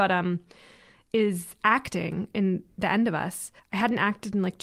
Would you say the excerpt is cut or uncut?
cut